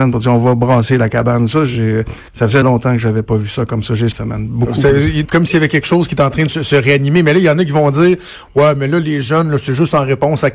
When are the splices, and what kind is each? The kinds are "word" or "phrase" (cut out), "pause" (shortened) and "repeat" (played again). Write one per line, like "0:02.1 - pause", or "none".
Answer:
0:02.3 - pause
0:02.6 - word
0:04.1 - phrase
0:05.2 - word
0:06.5 - word